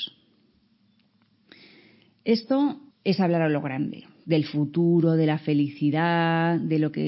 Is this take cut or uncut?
cut